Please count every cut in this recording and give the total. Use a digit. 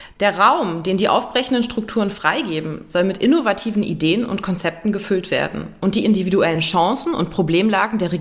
0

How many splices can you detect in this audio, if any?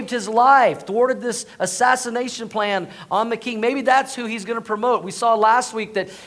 0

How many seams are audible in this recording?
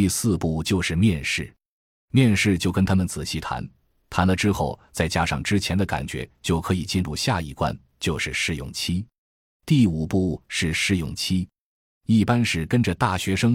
0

